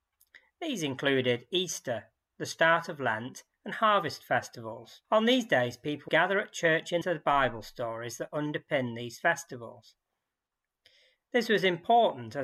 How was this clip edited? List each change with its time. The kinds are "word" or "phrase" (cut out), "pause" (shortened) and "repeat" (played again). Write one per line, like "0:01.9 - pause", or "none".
0:03.5 - pause
0:05.0 - pause
0:06.1 - word
0:07.0 - phrase